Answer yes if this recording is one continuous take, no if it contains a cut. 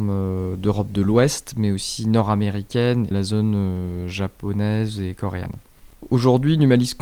no